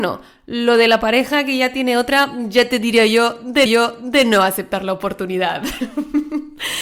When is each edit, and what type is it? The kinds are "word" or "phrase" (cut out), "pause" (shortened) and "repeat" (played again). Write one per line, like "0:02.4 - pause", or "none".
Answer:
0:03.7 - repeat